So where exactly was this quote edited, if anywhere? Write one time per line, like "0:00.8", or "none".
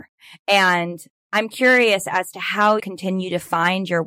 0:02.8